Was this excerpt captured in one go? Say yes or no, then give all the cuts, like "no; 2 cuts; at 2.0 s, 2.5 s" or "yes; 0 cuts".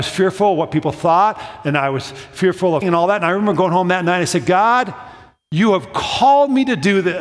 no; 1 cut; at 2.8 s